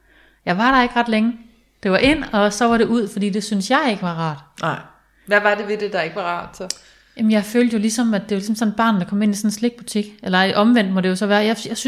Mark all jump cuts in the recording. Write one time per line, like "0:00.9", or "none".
none

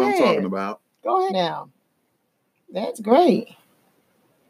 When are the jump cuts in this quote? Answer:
0:01.3
0:02.9

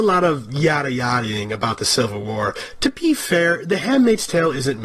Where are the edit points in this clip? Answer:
none

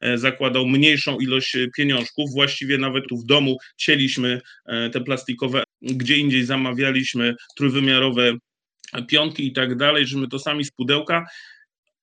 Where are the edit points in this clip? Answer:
0:03.1
0:05.6
0:10.7

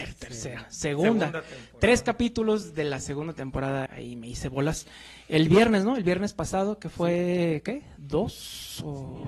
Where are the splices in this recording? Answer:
0:03.9

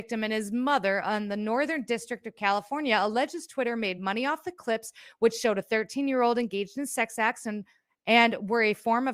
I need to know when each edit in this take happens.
none

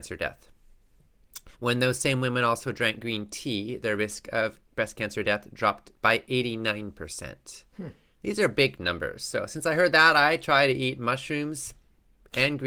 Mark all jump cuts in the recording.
0:01.5
0:04.6
0:05.9
0:07.7

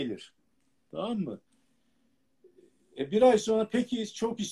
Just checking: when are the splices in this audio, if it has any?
none

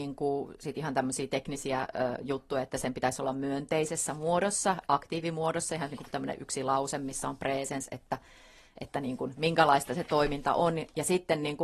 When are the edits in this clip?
none

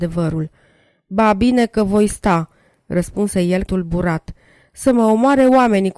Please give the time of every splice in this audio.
0:03.7

